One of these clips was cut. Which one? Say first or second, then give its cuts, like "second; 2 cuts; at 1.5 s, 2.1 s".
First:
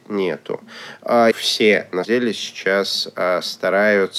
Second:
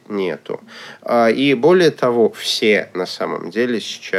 first; 2 cuts; at 1.3 s, 2.0 s